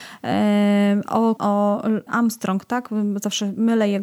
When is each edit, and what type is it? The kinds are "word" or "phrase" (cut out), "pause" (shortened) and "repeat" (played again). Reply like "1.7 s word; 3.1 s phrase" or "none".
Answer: 1.4 s word; 2.1 s word